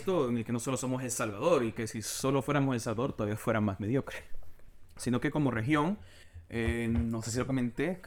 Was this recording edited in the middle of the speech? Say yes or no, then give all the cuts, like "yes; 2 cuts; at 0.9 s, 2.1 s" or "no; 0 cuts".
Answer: no; 0 cuts